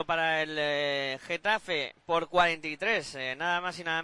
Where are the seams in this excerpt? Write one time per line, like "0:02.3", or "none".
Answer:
none